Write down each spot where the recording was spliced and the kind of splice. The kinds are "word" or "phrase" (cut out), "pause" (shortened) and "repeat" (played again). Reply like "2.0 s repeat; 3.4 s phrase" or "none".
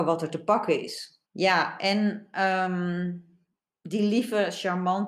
1.3 s pause